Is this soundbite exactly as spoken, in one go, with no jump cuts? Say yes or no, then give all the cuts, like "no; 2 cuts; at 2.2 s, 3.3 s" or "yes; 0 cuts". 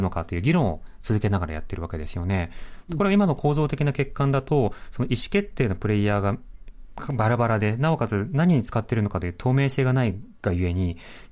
yes; 0 cuts